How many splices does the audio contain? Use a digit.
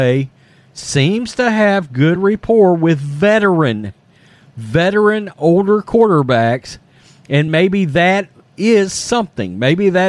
0